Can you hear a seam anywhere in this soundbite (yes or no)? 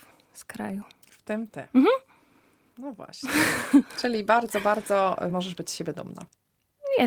no